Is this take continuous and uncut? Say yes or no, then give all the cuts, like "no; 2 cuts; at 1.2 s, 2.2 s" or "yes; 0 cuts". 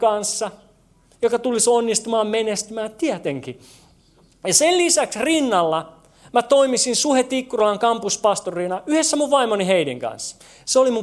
yes; 0 cuts